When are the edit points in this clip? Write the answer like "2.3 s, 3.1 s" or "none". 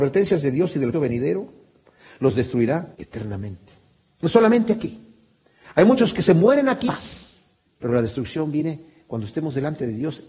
0.9 s, 2.9 s, 6.8 s